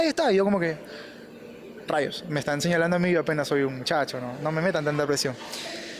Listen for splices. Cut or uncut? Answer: uncut